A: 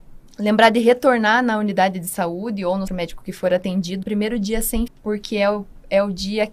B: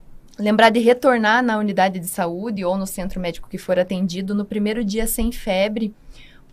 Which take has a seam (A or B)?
A